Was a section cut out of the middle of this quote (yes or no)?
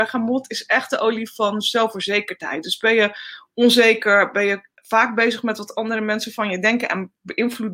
no